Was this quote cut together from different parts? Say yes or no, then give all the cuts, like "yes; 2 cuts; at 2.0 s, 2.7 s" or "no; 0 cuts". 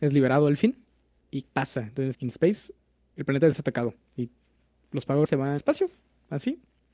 yes; 6 cuts; at 1.4 s, 2.1 s, 3.1 s, 3.5 s, 5.3 s, 5.6 s